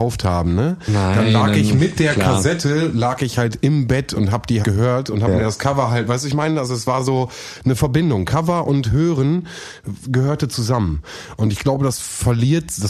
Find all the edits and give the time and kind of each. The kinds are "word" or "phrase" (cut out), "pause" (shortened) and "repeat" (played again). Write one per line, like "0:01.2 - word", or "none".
0:04.6 - word